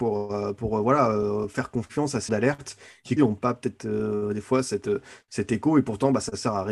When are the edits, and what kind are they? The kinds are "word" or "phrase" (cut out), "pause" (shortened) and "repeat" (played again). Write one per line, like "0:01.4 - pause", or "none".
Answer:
0:02.3 - word
0:03.2 - phrase